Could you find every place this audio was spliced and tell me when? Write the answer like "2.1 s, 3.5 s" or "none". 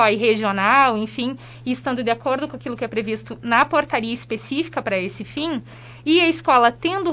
none